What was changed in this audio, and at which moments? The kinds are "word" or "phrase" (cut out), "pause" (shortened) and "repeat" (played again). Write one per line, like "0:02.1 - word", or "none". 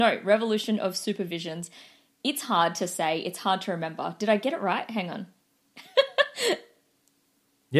none